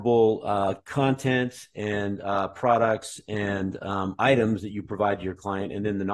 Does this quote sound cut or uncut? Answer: uncut